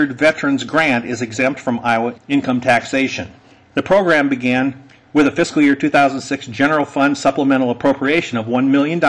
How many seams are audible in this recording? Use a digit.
0